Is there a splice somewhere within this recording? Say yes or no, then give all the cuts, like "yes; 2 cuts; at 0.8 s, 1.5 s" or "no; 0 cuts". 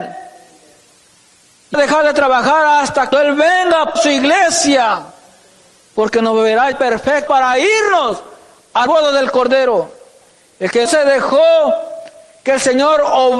yes; 7 cuts; at 1.7 s, 3.1 s, 4.0 s, 6.7 s, 7.3 s, 8.9 s, 10.9 s